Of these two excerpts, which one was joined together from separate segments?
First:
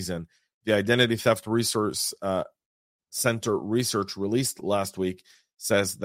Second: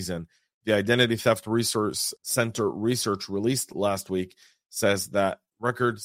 second; 1 cut; at 2.2 s

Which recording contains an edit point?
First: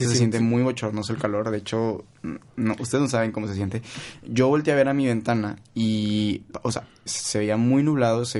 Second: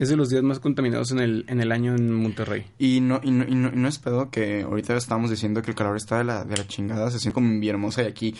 first; 1 cut; at 7.1 s

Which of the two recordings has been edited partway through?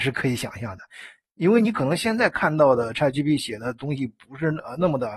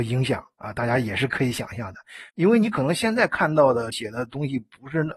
second; 2 cuts; at 2.3 s, 3.9 s

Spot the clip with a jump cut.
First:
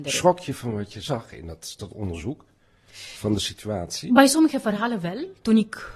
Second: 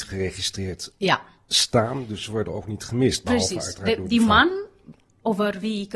first; 1 cut; at 1.8 s

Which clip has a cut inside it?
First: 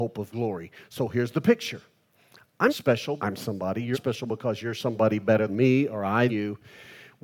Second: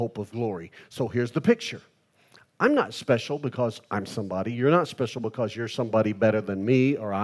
first; 5 cuts; at 2.7 s, 3.2 s, 3.9 s, 5.5 s, 6.3 s

